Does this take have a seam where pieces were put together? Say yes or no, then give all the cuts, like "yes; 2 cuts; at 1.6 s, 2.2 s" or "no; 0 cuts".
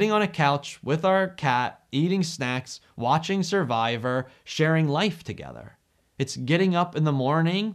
no; 0 cuts